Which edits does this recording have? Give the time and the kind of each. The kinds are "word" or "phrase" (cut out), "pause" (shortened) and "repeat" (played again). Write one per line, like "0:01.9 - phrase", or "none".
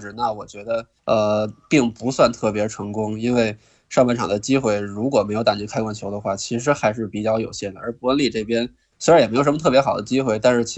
none